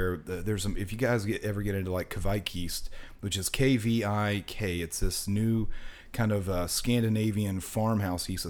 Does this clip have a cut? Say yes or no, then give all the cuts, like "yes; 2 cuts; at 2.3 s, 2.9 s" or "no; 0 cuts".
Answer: no; 0 cuts